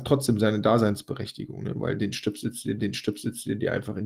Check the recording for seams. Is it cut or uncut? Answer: cut